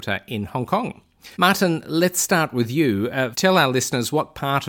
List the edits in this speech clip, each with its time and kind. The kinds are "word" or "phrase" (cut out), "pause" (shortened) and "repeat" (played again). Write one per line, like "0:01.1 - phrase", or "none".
0:01.3 - pause
0:03.3 - word